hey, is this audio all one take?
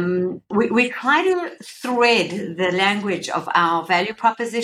yes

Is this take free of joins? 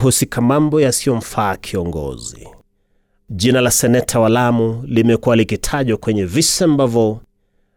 yes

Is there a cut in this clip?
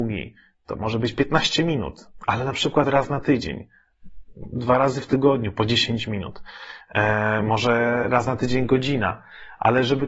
no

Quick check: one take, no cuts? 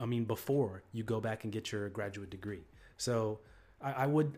yes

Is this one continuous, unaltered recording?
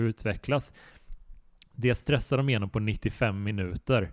yes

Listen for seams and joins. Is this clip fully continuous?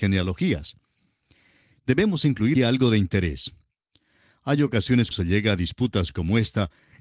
no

